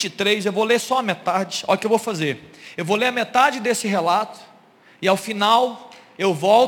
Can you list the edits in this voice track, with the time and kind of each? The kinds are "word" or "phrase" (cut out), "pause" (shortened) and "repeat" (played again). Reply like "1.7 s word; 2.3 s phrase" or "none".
none